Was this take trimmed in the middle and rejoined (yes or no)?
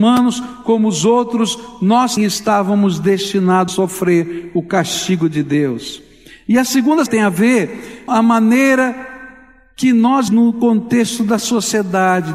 yes